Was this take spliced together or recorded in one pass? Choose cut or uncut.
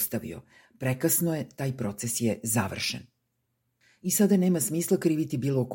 uncut